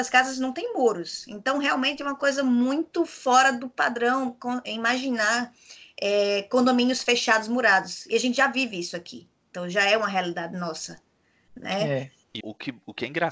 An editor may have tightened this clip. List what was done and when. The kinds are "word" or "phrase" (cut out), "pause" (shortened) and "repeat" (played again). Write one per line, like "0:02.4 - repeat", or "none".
0:12.4 - word